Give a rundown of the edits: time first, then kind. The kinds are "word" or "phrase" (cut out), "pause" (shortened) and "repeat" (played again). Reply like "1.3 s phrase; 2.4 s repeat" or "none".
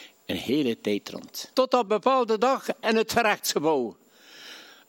1.5 s pause; 1.9 s word